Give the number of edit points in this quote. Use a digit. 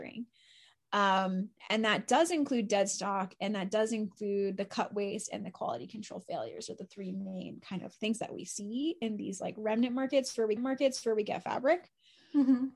3